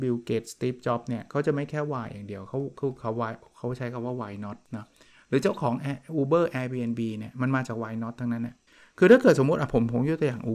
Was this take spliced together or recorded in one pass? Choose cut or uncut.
cut